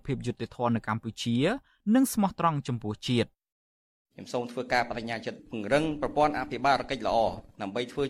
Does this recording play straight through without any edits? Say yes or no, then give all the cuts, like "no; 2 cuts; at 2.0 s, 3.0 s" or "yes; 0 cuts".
yes; 0 cuts